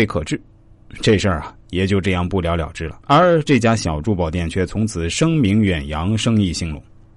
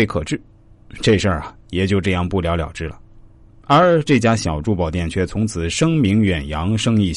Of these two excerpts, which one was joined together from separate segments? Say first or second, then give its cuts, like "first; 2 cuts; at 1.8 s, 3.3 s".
first; 1 cut; at 3.0 s